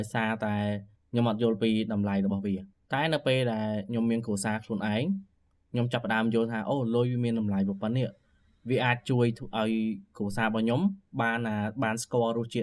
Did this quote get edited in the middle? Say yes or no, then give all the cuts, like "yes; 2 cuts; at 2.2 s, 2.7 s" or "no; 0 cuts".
yes; 2 cuts; at 1.0 s, 2.7 s